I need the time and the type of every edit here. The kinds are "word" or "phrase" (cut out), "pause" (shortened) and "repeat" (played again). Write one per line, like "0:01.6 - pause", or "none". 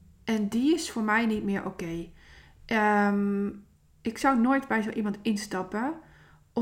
none